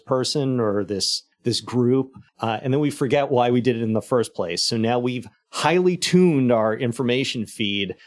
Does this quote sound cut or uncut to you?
cut